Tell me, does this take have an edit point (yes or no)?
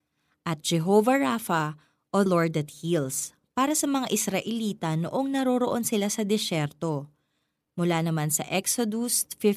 yes